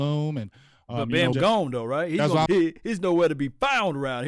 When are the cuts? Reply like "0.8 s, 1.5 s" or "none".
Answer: 1.3 s, 2.5 s